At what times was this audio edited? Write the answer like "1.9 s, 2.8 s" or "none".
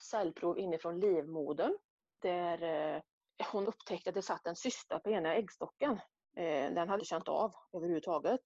3.6 s, 7.0 s